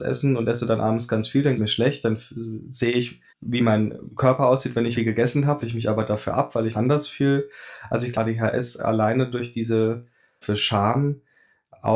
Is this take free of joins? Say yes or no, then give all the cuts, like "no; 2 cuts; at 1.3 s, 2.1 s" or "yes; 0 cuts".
no; 7 cuts; at 1.6 s, 3.3 s, 4.9 s, 5.6 s, 6.7 s, 8.1 s, 10.4 s